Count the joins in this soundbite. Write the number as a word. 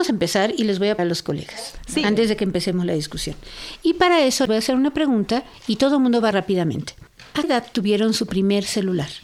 four